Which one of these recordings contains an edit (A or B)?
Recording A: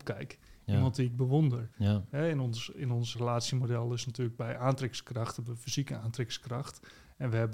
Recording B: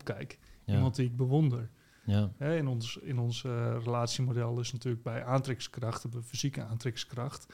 A